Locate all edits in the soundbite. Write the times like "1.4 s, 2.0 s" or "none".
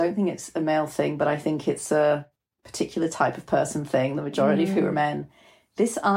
none